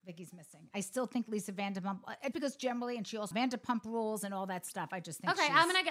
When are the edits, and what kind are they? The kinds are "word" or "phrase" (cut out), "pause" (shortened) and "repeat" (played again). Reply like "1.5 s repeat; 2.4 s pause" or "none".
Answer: 2.3 s word; 3.3 s phrase